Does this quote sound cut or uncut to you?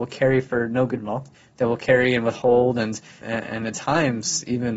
cut